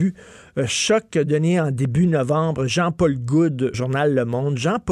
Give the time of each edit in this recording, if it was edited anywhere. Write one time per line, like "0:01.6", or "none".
0:03.7